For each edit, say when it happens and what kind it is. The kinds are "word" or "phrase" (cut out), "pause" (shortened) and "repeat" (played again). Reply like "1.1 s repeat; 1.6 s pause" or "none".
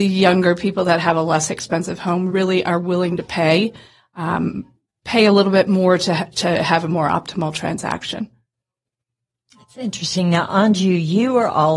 none